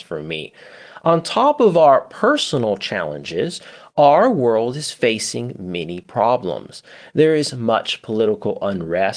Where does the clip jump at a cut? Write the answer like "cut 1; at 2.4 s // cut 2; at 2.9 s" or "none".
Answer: none